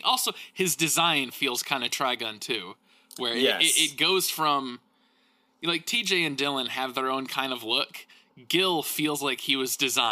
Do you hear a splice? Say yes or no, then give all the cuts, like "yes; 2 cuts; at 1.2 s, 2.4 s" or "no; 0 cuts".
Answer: no; 0 cuts